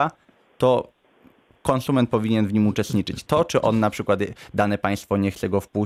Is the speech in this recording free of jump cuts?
yes; 0 cuts

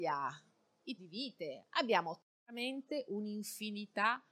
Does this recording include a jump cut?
yes; 2 cuts; at 1.0 s, 2.3 s

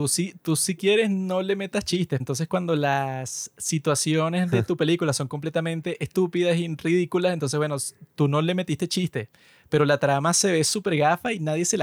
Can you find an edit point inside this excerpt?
yes; 1 cut; at 2.2 s

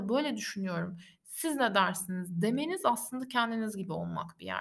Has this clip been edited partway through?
no; 0 cuts

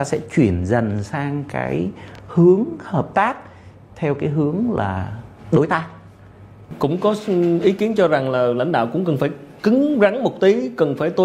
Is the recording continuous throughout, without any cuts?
no; 1 cut; at 9.6 s

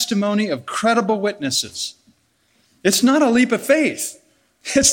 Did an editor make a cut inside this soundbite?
no; 0 cuts

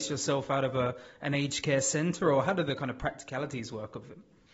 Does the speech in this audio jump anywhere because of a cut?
no; 0 cuts

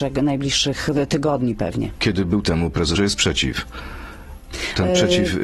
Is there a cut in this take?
yes; 2 cuts; at 2.4 s, 2.9 s

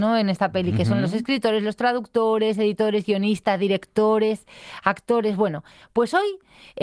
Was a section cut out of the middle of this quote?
no; 0 cuts

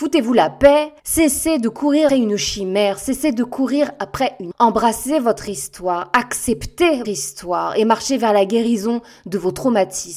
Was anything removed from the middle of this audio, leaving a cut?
yes; 4 cuts; at 1.0 s, 2.1 s, 4.5 s, 7.0 s

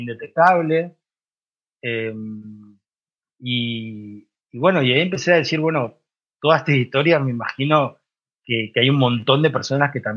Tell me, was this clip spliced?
no; 0 cuts

